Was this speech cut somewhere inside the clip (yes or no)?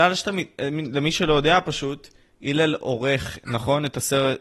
no